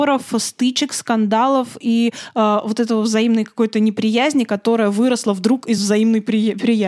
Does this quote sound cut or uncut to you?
uncut